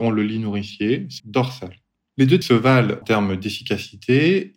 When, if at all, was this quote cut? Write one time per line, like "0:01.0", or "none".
0:01.2
0:02.4
0:03.0